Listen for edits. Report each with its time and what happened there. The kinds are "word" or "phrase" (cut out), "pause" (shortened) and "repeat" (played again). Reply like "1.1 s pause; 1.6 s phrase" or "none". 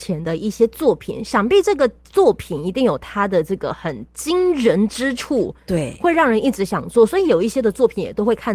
none